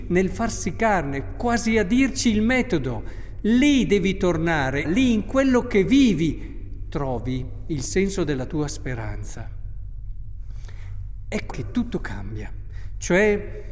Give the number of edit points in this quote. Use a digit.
2